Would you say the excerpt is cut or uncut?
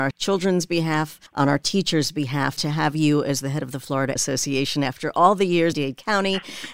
cut